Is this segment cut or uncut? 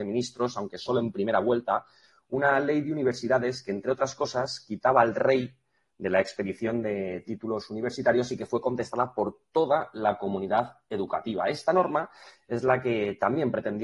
uncut